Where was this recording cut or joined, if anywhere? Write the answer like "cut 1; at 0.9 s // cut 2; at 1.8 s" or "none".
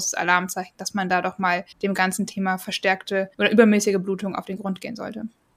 cut 1; at 1.7 s // cut 2; at 3.3 s